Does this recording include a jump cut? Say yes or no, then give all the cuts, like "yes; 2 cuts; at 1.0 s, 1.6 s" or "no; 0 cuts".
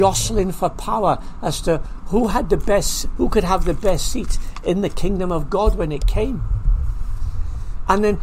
no; 0 cuts